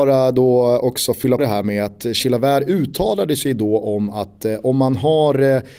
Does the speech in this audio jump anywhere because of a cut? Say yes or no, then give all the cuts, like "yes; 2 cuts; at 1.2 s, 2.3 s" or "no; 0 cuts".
yes; 1 cut; at 1.4 s